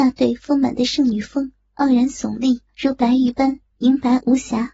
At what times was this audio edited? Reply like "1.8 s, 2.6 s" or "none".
2.7 s

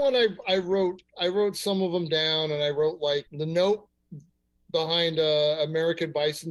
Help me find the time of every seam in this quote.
3.3 s

